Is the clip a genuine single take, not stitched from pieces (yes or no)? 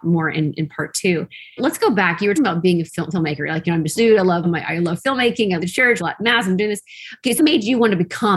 no